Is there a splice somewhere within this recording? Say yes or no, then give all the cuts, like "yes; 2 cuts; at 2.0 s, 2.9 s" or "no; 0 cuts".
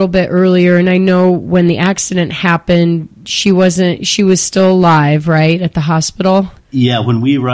yes; 1 cut; at 6.6 s